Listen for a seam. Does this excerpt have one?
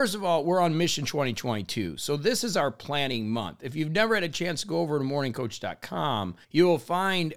yes; 1 cut; at 6.4 s

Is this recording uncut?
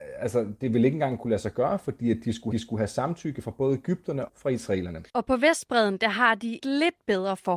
no; 4 cuts; at 2.5 s, 4.3 s, 5.1 s, 6.6 s

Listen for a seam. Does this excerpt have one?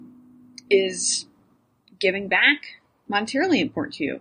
no; 0 cuts

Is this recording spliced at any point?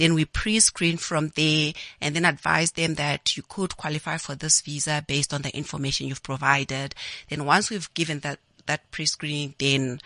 no; 0 cuts

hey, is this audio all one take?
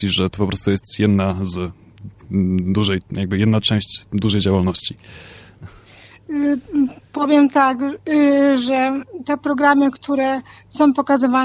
yes; 0 cuts

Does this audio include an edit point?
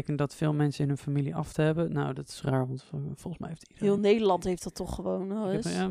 no; 0 cuts

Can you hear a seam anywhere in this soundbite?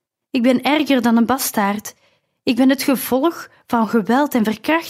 no; 0 cuts

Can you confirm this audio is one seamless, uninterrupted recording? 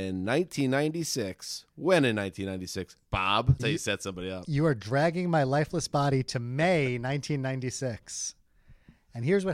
no; 1 cut; at 3.6 s

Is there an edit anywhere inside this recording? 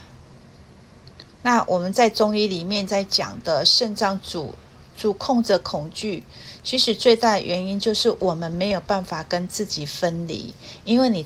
no; 0 cuts

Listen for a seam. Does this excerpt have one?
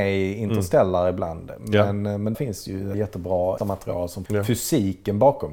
yes; 4 cuts; at 2.3 s, 2.9 s, 3.6 s, 4.3 s

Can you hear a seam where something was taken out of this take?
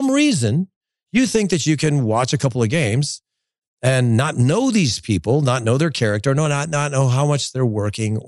no; 0 cuts

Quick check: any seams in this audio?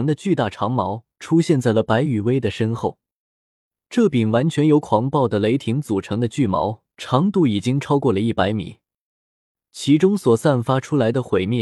yes; 2 cuts; at 1.1 s, 6.9 s

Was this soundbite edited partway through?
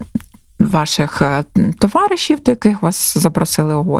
no; 0 cuts

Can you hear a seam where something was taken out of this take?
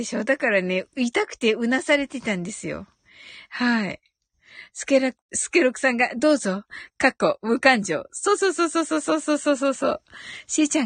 no; 0 cuts

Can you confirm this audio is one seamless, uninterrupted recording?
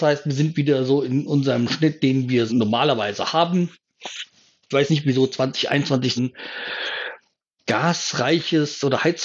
no; 3 cuts; at 2.5 s, 4.9 s, 6.2 s

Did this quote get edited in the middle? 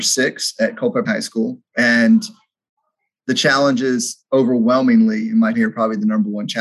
yes; 3 cuts; at 1.1 s, 1.7 s, 5.5 s

